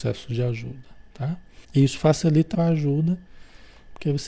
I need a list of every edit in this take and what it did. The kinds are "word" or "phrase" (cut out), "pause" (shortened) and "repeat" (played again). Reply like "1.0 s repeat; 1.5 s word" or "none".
1.6 s pause; 2.5 s word